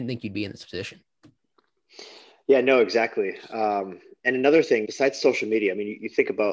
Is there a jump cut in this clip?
yes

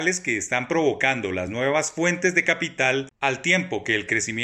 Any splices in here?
no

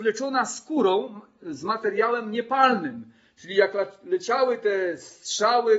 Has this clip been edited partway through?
no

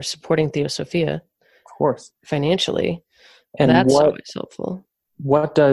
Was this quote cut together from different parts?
no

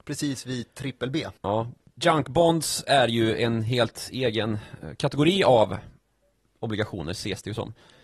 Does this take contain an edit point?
yes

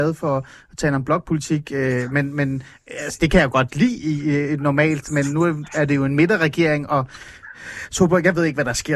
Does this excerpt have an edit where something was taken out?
no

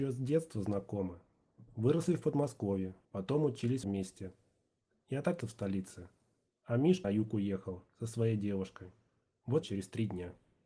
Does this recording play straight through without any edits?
no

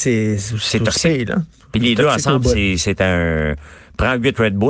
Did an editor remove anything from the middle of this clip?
no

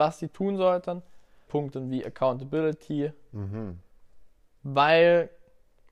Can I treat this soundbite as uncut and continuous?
no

